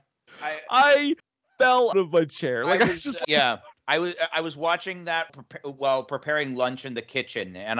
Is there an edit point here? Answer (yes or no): yes